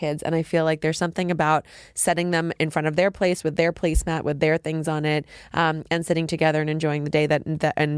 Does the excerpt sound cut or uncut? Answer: uncut